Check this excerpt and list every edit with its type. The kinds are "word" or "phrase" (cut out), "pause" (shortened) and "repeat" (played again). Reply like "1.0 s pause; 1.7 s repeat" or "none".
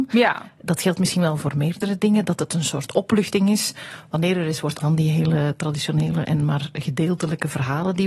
4.8 s word